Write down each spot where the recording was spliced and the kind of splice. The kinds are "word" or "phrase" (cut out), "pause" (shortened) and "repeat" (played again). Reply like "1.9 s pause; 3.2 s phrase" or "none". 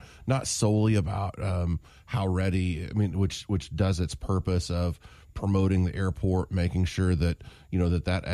none